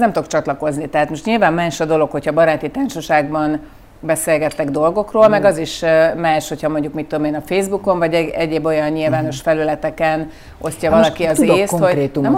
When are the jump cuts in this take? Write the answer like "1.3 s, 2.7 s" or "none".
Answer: none